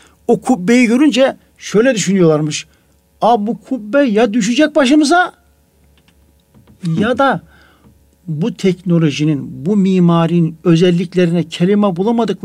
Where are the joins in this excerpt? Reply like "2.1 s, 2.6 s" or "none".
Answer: 8.0 s